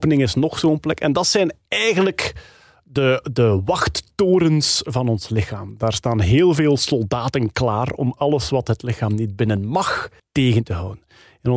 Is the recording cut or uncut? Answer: uncut